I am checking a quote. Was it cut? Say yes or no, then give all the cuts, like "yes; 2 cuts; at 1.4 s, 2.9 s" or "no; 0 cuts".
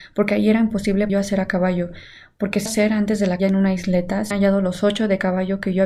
yes; 4 cuts; at 1.1 s, 2.7 s, 3.4 s, 4.3 s